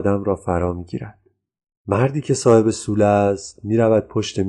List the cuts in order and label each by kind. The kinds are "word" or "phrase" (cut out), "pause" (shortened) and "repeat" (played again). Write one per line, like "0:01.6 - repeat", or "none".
none